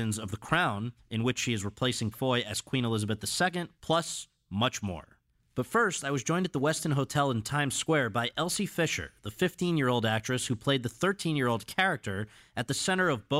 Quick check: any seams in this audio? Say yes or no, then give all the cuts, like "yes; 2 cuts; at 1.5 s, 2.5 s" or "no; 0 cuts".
yes; 2 cuts; at 2.1 s, 3.7 s